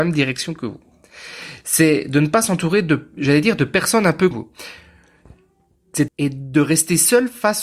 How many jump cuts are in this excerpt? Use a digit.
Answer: 2